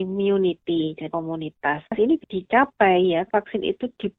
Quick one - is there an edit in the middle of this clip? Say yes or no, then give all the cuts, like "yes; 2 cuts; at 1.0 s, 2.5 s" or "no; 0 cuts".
yes; 3 cuts; at 1.1 s, 2.2 s, 3.3 s